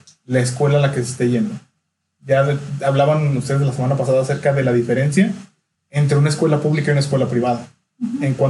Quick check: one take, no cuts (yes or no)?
no